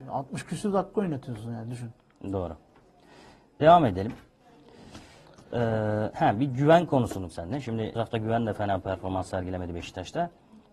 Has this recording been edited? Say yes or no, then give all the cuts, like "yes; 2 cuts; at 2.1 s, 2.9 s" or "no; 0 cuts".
yes; 2 cuts; at 7.3 s, 8.0 s